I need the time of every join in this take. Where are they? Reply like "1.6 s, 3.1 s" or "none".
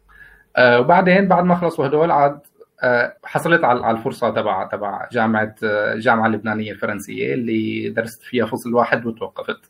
3.2 s